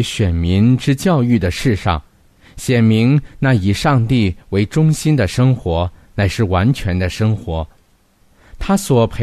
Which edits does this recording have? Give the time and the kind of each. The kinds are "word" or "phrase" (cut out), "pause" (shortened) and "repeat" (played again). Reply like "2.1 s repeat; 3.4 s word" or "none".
none